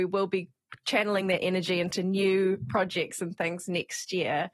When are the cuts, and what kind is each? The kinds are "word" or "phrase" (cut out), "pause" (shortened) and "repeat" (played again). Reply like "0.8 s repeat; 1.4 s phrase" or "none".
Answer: none